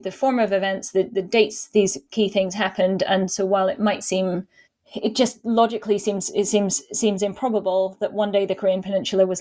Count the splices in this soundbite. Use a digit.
1